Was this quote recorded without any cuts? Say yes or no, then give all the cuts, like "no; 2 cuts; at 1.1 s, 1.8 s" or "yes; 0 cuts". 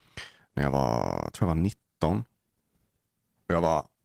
yes; 0 cuts